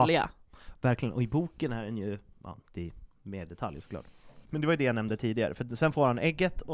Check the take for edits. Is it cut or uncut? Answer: cut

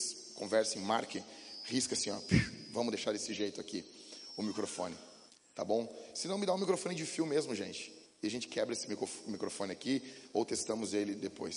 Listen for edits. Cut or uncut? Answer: cut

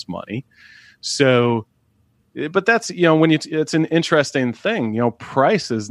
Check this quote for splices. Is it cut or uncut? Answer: uncut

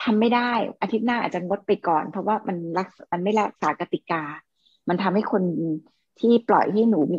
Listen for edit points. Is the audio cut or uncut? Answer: uncut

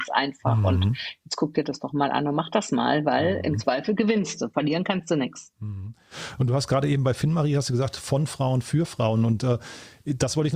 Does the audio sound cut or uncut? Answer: uncut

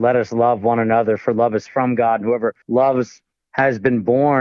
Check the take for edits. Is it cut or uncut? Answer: cut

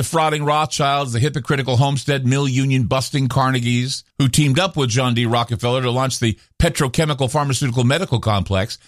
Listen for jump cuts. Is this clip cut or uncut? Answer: cut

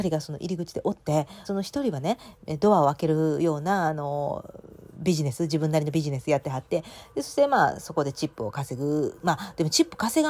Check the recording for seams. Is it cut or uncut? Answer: cut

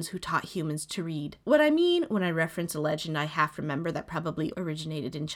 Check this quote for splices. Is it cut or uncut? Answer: cut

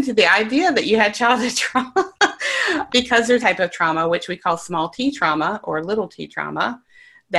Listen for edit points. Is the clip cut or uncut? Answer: cut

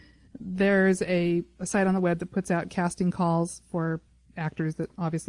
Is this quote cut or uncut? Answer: uncut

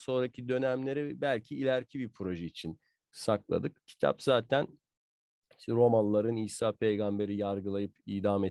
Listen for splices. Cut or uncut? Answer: uncut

